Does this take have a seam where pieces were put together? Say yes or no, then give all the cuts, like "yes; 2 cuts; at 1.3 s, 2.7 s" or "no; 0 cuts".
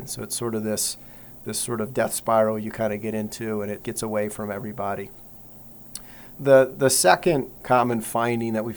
yes; 4 cuts; at 3.8 s, 6.4 s, 6.7 s, 7.6 s